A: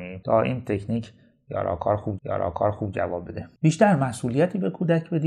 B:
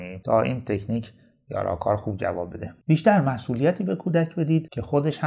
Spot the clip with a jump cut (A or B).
A